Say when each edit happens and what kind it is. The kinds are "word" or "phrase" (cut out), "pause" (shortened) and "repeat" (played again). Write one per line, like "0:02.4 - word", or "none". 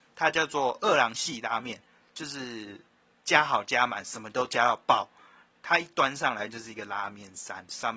none